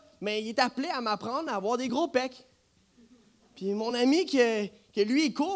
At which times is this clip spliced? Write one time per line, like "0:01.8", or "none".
none